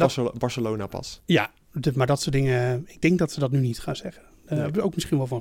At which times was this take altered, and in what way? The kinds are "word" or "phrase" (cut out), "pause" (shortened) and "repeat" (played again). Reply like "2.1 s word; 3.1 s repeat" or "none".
none